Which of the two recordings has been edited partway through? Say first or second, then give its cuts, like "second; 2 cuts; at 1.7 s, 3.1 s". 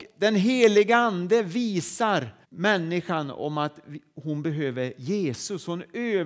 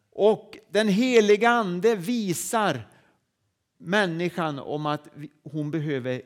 first; 1 cut; at 2.4 s